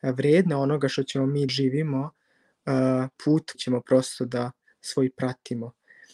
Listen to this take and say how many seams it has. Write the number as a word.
three